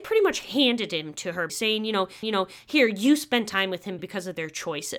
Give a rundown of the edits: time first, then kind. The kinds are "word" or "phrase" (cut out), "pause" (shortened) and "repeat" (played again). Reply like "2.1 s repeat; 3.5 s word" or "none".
1.5 s word; 2.2 s repeat; 4.0 s word

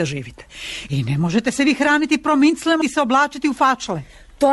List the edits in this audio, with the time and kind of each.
2.8 s word

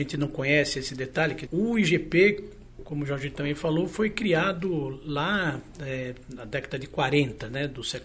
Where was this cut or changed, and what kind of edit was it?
1.5 s word

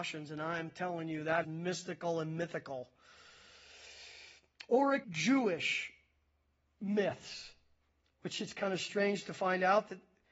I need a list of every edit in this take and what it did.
1.4 s word; 5.0 s phrase

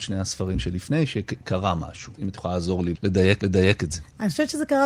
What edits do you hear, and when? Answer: 3.4 s repeat

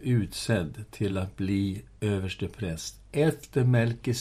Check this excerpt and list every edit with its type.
none

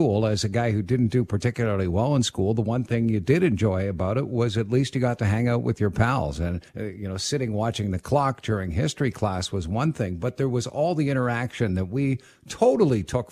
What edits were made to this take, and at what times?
6.7 s pause

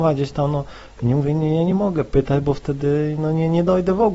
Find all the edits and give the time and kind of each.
none

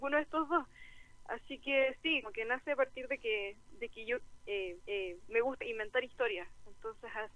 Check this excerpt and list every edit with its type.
2.2 s word; 4.8 s repeat; 5.6 s word

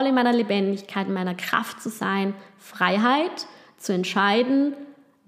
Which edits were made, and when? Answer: none

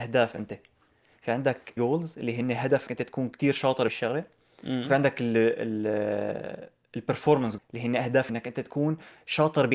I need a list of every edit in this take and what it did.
1.8 s word; 2.9 s word; 3.9 s word; 7.6 s word; 8.3 s word

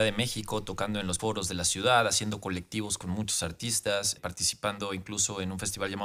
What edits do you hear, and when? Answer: 1.2 s word; 4.2 s word

